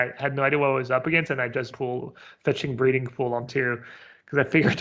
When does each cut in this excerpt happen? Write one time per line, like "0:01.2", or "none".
0:01.7
0:03.5